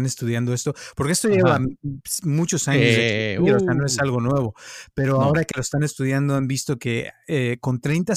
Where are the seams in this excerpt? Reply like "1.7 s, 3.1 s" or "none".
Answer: none